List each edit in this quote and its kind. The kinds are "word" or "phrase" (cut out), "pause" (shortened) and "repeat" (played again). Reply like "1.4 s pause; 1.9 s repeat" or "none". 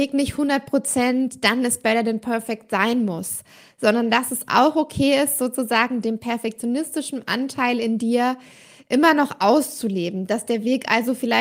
none

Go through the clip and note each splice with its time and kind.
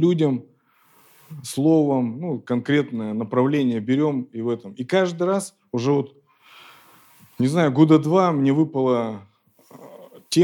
none

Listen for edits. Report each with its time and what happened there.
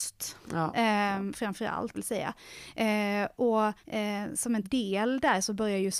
1.9 s phrase; 3.8 s pause; 4.6 s word

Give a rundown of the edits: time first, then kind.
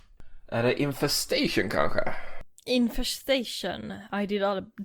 none

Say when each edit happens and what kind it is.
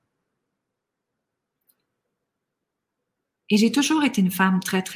none

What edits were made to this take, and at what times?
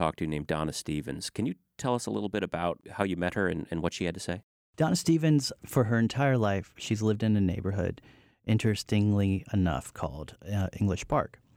none

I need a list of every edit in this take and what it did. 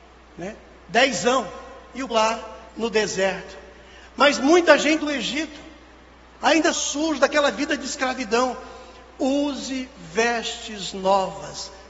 2.1 s word; 2.7 s pause; 5.0 s phrase; 6.7 s phrase

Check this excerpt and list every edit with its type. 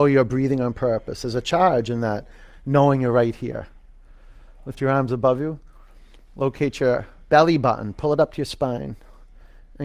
none

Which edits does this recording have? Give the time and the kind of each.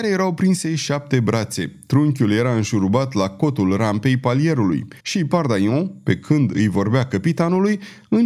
5.0 s pause

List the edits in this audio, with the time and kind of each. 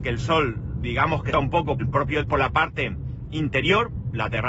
1.3 s phrase; 1.8 s word; 2.2 s phrase

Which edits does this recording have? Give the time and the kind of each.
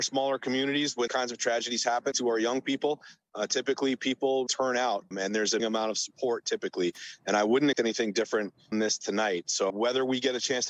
1.1 s word; 2.1 s word; 4.5 s word; 5.1 s word; 5.6 s word; 7.7 s word; 8.7 s word; 9.7 s word

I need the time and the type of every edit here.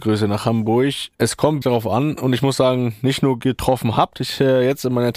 1.6 s word

